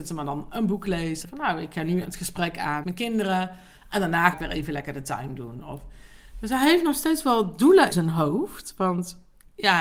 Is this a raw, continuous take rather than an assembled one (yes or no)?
no